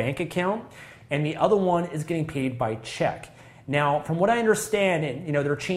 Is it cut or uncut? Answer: uncut